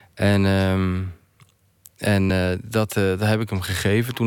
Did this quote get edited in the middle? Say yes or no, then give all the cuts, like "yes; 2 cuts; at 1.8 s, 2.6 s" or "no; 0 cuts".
no; 0 cuts